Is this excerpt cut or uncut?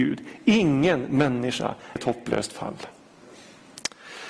cut